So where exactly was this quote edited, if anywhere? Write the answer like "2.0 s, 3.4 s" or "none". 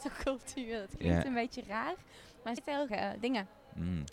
2.6 s, 2.9 s